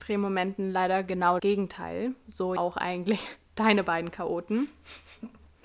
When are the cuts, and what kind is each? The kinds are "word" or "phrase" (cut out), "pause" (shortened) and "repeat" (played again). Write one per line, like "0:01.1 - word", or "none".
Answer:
0:01.4 - word
0:02.6 - word